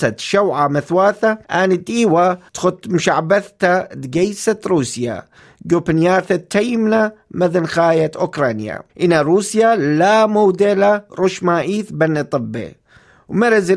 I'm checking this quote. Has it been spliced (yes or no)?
yes